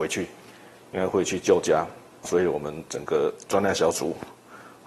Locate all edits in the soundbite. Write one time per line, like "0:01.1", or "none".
0:02.2